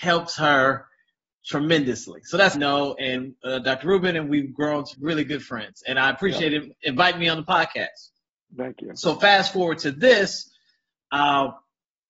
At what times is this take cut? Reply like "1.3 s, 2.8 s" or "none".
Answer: 2.5 s, 4.9 s